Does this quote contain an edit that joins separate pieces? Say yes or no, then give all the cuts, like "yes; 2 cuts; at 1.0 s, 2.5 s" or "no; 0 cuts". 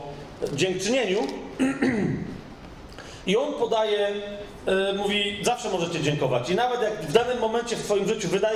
no; 0 cuts